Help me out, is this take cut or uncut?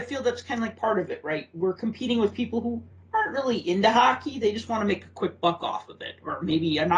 uncut